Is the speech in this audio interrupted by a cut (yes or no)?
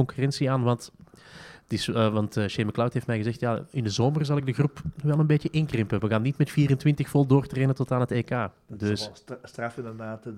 no